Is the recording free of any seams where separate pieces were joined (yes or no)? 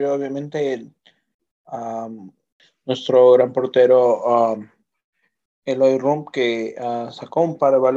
yes